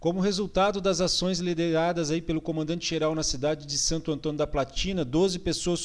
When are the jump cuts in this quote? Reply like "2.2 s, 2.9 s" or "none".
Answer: none